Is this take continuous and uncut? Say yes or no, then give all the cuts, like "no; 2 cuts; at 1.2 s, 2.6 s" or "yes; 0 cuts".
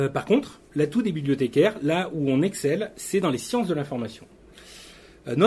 yes; 0 cuts